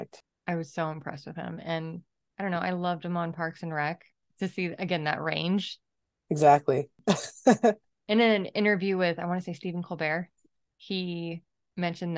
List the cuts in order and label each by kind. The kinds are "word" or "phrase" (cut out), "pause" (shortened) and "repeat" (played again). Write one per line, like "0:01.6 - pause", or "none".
none